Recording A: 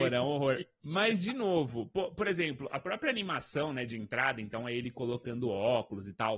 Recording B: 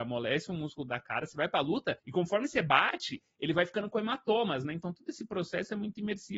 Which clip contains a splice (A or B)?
B